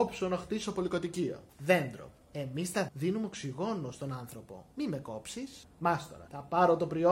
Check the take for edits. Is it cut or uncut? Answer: cut